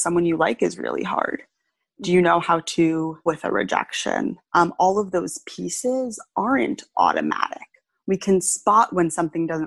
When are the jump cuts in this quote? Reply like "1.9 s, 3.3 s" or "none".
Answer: 3.3 s, 4.4 s